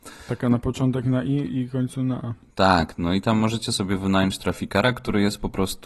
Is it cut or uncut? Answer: uncut